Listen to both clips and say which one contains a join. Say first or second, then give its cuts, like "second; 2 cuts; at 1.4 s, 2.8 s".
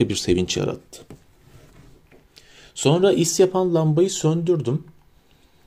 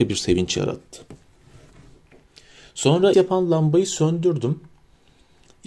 second; 1 cut; at 3.1 s